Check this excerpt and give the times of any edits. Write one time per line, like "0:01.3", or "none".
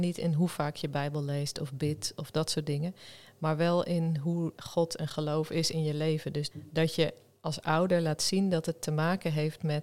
0:04.6
0:06.5

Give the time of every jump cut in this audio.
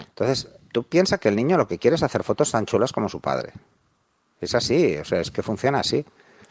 none

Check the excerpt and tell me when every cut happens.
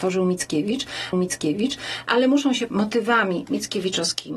0:01.1
0:02.7

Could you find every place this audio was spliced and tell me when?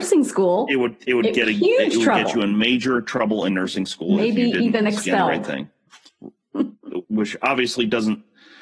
0:07.0

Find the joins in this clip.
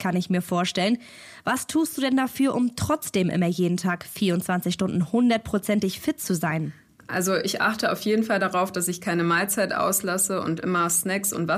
none

